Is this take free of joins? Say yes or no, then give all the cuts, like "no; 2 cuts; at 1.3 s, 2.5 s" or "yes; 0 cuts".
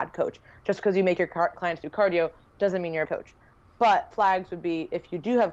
no; 3 cuts; at 1.5 s, 3.0 s, 4.1 s